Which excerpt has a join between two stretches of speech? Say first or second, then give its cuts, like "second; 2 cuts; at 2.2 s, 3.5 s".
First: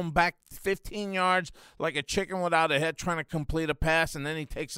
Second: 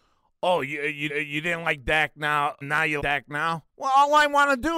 second; 4 cuts; at 1.1 s, 2.6 s, 3.0 s, 3.7 s